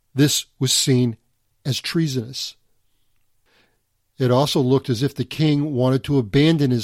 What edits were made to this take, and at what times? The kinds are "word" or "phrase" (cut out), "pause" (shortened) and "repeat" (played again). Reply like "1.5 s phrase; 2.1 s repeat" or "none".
none